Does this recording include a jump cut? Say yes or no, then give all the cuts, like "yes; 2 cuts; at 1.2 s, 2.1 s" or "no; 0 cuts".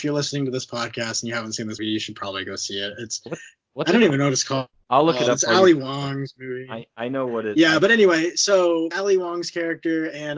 yes; 2 cuts; at 1.8 s, 8.9 s